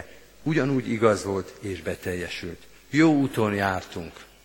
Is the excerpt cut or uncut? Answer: uncut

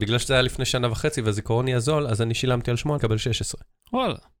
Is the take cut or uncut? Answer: cut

